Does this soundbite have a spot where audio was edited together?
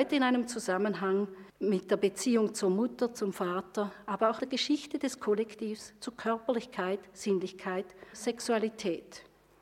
yes; 3 cuts; at 1.5 s, 4.4 s, 8.1 s

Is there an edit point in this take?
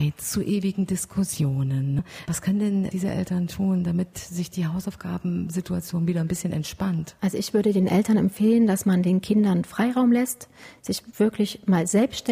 no; 0 cuts

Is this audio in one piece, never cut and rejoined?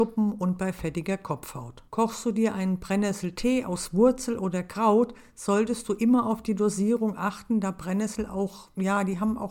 no; 1 cut; at 1.9 s

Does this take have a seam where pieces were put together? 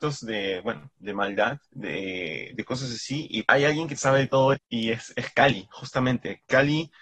yes; 4 cuts; at 1.6 s, 3.5 s, 4.0 s, 4.6 s

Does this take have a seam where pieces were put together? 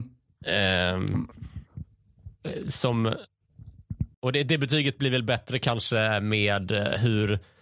yes; 1 cut; at 4.1 s

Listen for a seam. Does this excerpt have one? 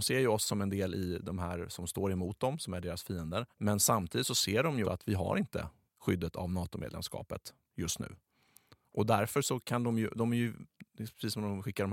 yes; 3 cuts; at 3.5 s, 4.8 s, 5.9 s

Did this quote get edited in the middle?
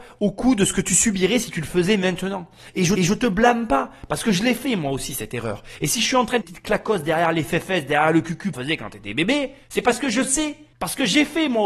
yes; 5 cuts; at 3.0 s, 6.4 s, 8.5 s, 9.6 s, 10.7 s

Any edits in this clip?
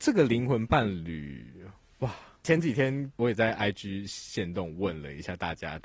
no; 0 cuts

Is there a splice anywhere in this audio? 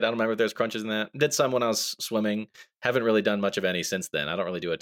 no; 0 cuts

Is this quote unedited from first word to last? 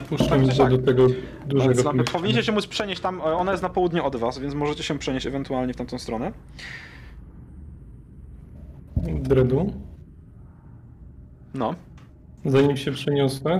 yes; 0 cuts

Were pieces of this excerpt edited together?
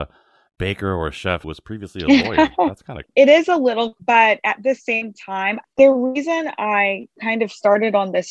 yes; 3 cuts; at 1.4 s, 3.0 s, 4.0 s

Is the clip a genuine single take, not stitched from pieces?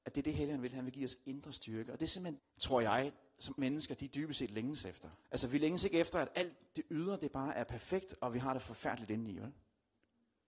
no; 3 cuts; at 2.4 s, 3.6 s, 5.2 s

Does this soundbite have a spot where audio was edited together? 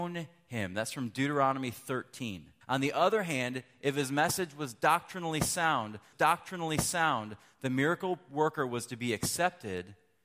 yes; 2 cuts; at 2.6 s, 6.1 s

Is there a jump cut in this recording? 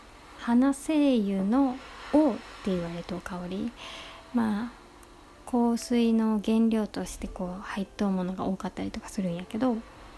no; 0 cuts

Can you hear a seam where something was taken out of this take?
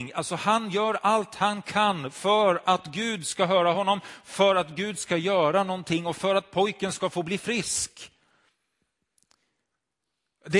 no; 0 cuts

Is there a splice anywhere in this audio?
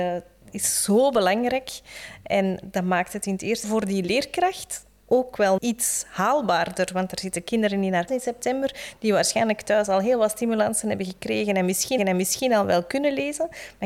yes; 5 cuts; at 3.6 s, 5.0 s, 5.6 s, 8.1 s, 12.0 s

